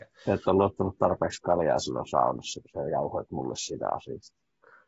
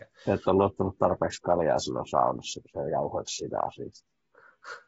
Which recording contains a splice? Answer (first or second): second